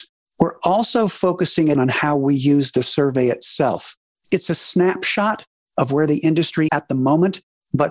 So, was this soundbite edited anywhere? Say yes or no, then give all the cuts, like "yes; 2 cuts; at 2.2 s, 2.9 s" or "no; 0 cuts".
yes; 2 cuts; at 1.8 s, 6.7 s